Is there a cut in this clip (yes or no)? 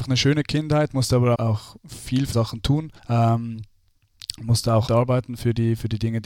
yes